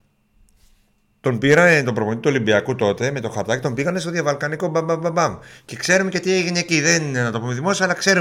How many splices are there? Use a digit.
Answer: 0